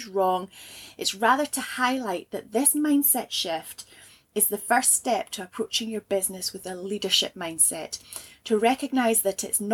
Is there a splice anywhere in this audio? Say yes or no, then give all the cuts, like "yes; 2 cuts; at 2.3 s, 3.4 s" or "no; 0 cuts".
no; 0 cuts